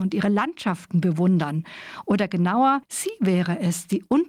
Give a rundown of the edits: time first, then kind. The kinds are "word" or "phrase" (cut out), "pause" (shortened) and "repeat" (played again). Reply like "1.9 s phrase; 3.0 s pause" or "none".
2.8 s pause